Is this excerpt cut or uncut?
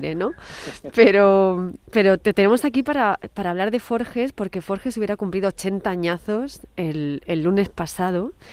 uncut